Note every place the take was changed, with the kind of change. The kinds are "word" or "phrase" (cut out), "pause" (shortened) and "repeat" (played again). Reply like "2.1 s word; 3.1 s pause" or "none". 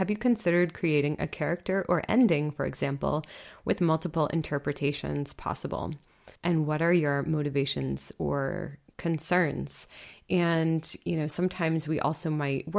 6.4 s pause

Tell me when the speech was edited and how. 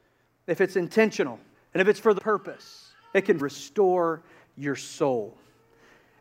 1.5 s pause; 2.2 s word; 3.0 s pause; 3.4 s phrase

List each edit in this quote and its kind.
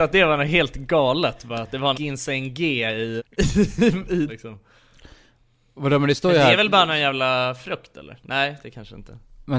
1.9 s word; 3.2 s word; 4.3 s word

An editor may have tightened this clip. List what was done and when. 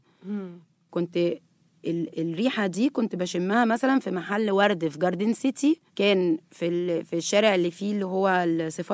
5.9 s pause

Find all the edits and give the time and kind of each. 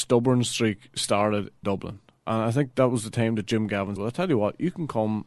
1.6 s word; 4.0 s word

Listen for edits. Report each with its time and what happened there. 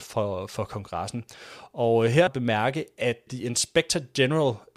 2.3 s phrase; 3.3 s word

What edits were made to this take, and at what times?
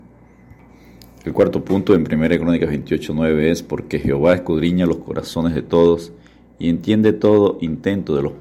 none

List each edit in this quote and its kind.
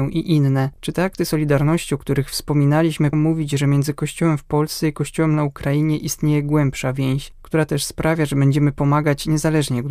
3.1 s word

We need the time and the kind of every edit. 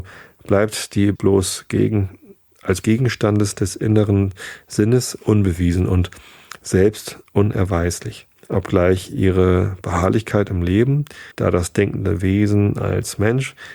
1.2 s phrase; 2.8 s word; 8.4 s pause; 11.3 s pause

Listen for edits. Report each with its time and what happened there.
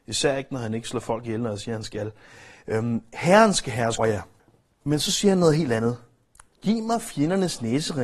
4.0 s word; 4.4 s pause

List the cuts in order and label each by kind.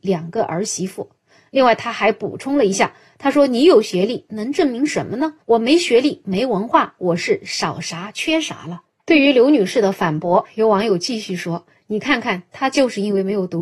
5.4 s pause

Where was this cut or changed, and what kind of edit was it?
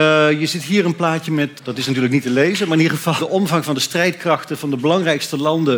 1.6 s word; 3.2 s word

